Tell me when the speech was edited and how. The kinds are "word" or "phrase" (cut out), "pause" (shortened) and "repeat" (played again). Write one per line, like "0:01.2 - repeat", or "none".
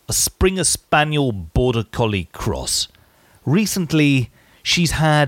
none